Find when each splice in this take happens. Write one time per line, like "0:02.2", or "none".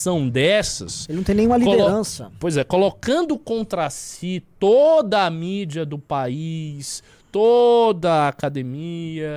none

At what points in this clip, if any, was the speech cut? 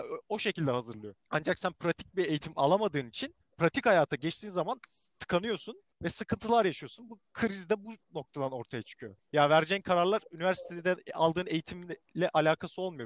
0:01.2
0:03.4
0:05.9
0:09.2

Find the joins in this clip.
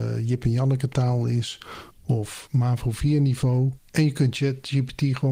0:01.9

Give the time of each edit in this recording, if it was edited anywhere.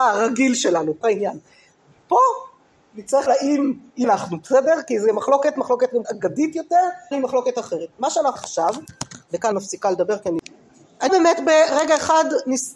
0:01.0
0:03.3
0:04.0
0:05.5
0:06.0
0:07.1
0:08.4
0:09.5
0:11.1

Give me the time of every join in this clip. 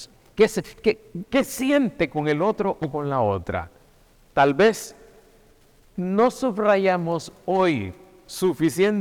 none

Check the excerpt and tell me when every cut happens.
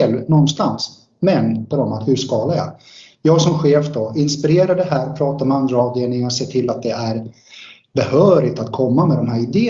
0:01.7

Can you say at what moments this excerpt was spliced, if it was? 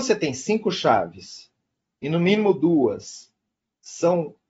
none

